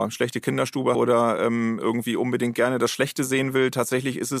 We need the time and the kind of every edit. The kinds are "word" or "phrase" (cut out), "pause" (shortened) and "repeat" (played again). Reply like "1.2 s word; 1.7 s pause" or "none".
0.9 s word